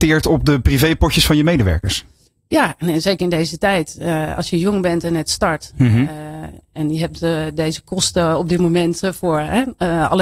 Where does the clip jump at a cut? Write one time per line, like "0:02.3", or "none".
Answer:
none